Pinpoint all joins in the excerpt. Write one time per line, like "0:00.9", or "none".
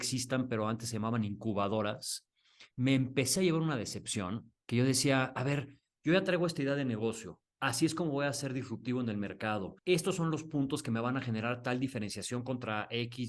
0:02.7
0:04.6
0:07.5
0:09.8